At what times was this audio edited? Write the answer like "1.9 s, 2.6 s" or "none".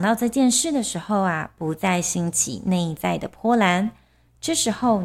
none

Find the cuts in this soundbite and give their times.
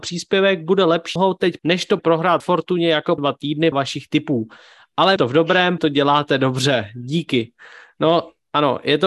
1.2 s, 1.6 s, 2.0 s, 2.4 s, 3.2 s, 3.7 s, 5.2 s, 5.8 s

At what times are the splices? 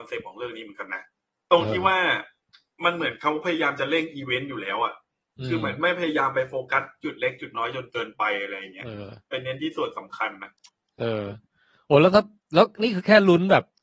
none

